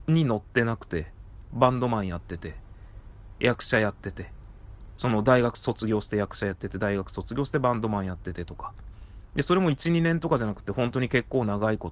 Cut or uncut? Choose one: cut